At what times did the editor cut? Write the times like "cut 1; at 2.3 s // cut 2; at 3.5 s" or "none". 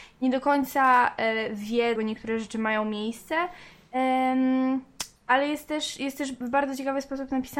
cut 1; at 1.9 s // cut 2; at 5.2 s